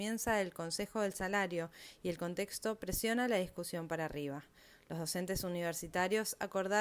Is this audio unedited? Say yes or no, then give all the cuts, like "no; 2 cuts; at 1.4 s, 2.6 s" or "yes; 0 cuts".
yes; 0 cuts